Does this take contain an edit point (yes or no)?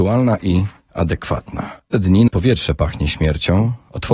yes